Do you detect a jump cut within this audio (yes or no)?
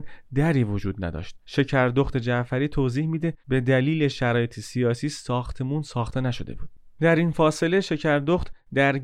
yes